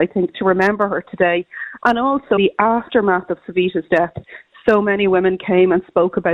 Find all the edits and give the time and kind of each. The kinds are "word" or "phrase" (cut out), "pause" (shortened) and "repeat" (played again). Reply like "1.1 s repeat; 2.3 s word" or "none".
2.4 s word